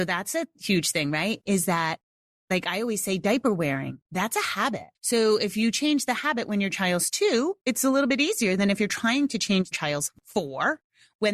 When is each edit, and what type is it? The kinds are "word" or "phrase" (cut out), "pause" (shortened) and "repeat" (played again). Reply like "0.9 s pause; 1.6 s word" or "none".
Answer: 4.1 s pause; 4.9 s pause; 9.7 s phrase